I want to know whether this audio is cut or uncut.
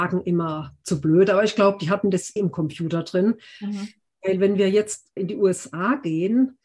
cut